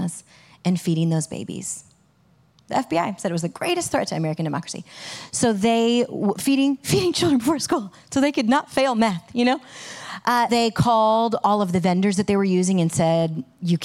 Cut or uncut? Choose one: cut